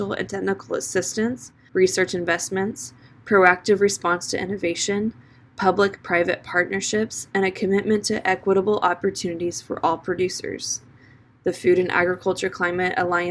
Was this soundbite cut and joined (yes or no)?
no